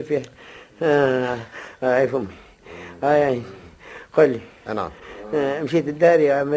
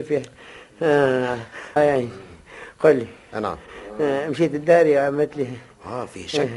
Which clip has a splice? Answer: second; 1 cut; at 1.8 s

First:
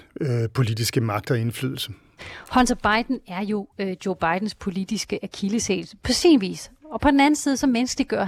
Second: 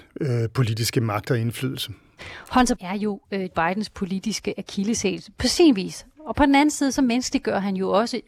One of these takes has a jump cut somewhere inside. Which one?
second; 2 cuts; at 2.8 s, 3.5 s

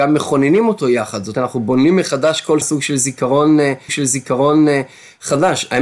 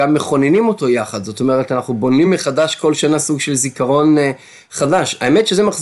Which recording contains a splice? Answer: first; 3 cuts; at 1.3 s, 2.6 s, 3.9 s

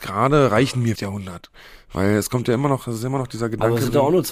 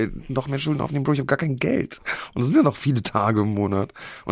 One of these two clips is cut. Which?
first; 1 cut; at 1.0 s

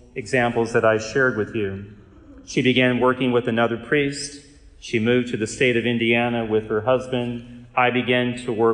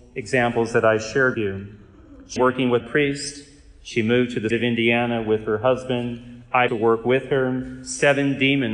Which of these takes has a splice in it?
second; 5 cuts; at 1.3 s, 2.4 s, 2.8 s, 4.5 s, 6.7 s

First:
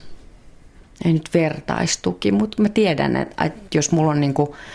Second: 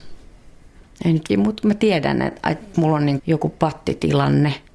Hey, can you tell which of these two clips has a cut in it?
second; 3 cuts; at 1.3 s, 2.7 s, 3.2 s

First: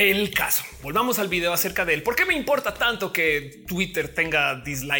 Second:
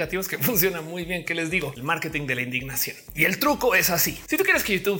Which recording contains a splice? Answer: second; 1 cut; at 1.8 s

